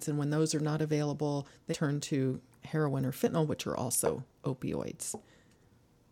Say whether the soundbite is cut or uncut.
cut